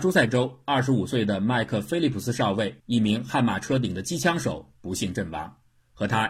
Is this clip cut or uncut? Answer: cut